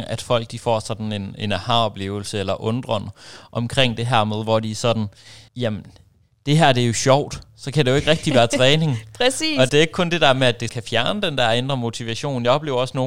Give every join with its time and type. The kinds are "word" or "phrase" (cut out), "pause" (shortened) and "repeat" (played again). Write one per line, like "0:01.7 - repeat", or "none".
0:05.5 - pause
0:09.7 - word
0:10.7 - word